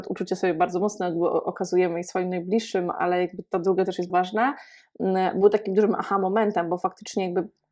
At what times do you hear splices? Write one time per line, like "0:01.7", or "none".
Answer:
0:04.1